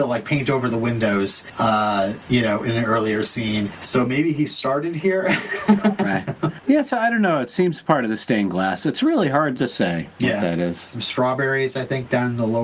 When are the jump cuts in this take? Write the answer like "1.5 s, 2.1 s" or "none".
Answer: none